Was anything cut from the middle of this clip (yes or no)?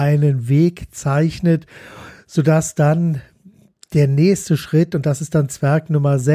no